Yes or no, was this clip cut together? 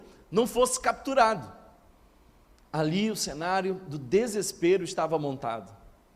no